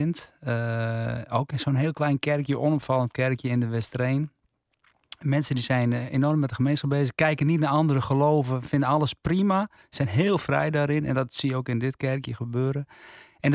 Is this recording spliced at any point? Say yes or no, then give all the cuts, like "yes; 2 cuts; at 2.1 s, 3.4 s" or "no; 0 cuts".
no; 0 cuts